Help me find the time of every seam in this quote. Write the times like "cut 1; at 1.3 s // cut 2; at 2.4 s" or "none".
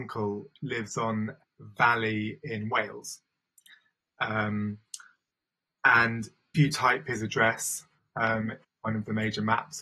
cut 1; at 1.4 s // cut 2; at 6.5 s // cut 3; at 8.6 s